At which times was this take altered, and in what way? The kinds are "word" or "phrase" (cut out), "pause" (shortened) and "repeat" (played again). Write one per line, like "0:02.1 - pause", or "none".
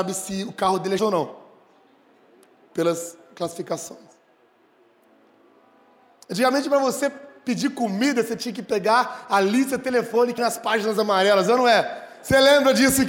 0:01.0 - word
0:10.4 - word